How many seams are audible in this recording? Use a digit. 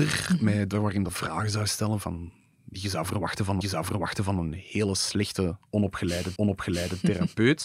3